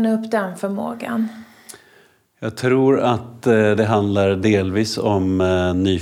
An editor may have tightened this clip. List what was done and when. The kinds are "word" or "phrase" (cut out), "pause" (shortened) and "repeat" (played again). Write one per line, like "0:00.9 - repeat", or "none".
none